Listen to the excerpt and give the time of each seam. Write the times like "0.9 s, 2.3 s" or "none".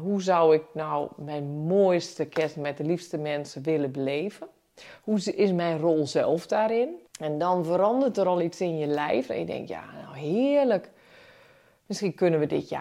7.1 s